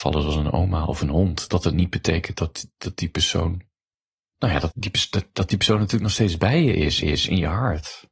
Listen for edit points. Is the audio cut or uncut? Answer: cut